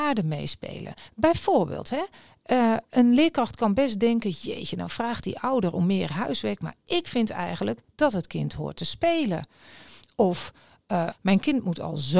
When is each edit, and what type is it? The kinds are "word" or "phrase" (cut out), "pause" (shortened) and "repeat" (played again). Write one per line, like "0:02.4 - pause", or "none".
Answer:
0:11.1 - phrase